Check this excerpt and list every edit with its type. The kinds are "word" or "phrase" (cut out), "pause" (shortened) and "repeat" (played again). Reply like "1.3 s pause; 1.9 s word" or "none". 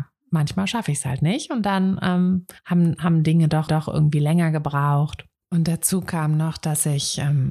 2.6 s pause; 3.7 s repeat; 5.4 s pause

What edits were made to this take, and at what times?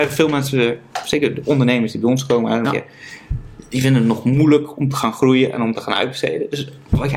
2.6 s word

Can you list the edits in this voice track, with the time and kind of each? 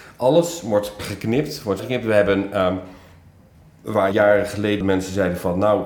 1.0 s word; 1.8 s word; 4.1 s word; 4.8 s word

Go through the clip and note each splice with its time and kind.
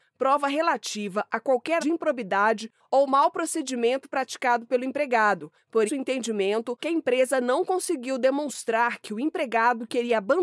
1.8 s word; 5.9 s word; 6.8 s word

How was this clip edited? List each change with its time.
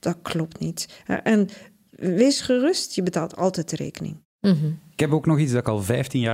none

